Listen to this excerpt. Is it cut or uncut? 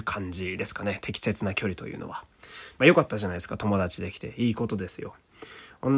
uncut